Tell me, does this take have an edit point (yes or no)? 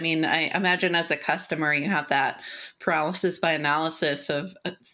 no